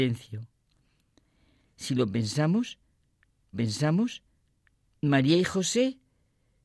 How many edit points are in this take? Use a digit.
1